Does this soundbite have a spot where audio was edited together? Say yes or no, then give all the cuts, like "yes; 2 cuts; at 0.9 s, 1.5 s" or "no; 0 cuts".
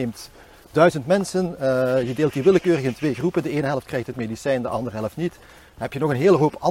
no; 0 cuts